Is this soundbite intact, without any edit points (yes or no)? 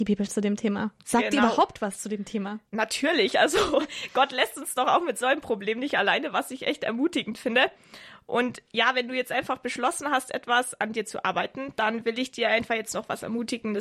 no